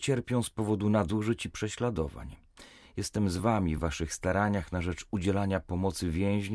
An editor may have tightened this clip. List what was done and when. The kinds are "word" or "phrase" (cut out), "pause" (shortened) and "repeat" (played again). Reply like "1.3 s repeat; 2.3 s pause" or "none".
none